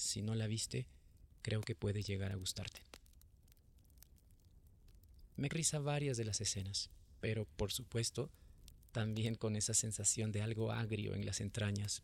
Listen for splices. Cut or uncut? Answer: cut